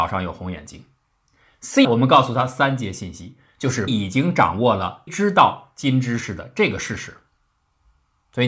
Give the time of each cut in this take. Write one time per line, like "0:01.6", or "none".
0:01.8
0:03.9
0:05.1